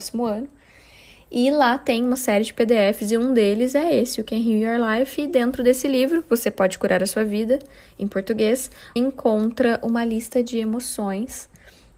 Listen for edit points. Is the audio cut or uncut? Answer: cut